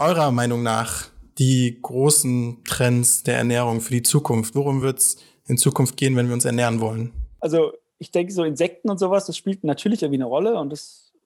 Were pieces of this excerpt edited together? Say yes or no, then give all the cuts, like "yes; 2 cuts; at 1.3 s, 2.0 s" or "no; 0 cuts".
no; 0 cuts